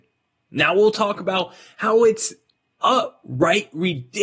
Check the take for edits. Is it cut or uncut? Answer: uncut